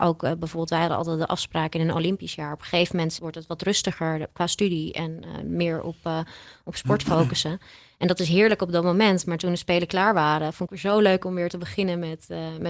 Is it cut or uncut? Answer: cut